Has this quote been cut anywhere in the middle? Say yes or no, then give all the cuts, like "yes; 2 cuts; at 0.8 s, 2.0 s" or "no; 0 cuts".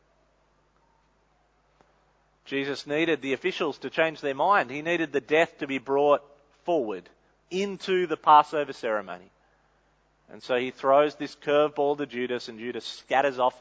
no; 0 cuts